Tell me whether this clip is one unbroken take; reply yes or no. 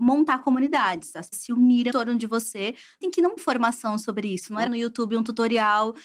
no